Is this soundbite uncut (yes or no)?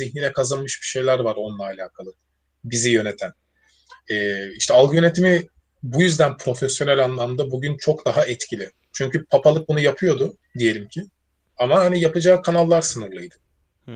yes